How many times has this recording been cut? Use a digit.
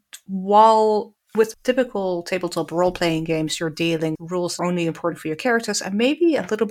3